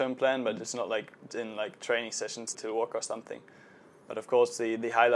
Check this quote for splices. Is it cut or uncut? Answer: cut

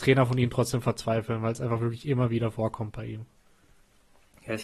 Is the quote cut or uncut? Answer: uncut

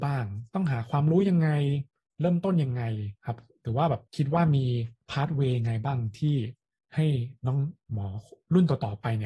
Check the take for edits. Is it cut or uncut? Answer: cut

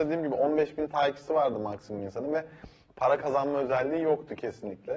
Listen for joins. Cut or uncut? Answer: uncut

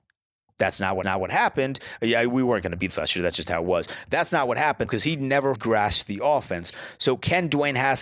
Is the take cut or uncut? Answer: cut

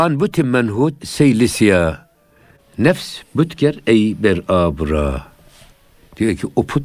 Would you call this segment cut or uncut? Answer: cut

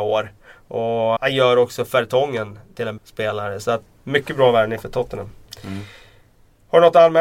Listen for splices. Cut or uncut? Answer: cut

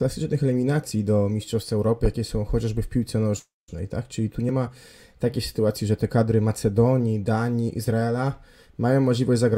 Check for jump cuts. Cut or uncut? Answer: uncut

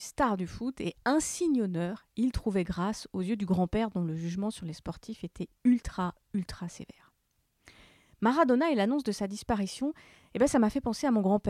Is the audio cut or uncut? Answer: uncut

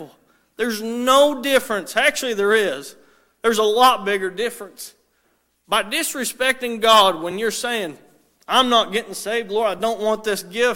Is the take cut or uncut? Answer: uncut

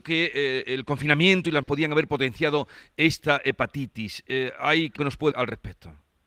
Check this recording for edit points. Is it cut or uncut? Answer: cut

